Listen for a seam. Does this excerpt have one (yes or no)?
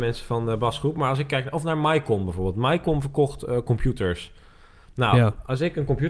no